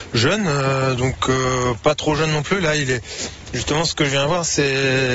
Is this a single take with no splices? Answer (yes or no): yes